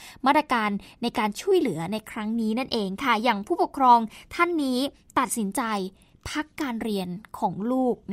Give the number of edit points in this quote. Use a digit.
0